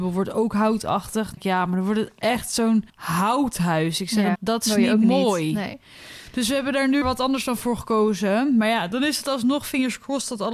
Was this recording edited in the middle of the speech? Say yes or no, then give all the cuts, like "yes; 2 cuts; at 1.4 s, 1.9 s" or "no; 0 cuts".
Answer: yes; 4 cuts; at 1.4 s, 2.9 s, 4.3 s, 7.0 s